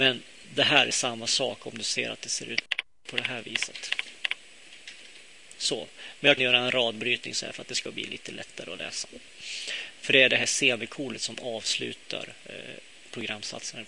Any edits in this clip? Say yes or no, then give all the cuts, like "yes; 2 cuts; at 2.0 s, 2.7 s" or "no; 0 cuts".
yes; 1 cut; at 6.4 s